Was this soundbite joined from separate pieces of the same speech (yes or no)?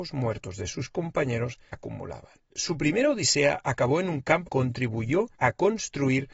yes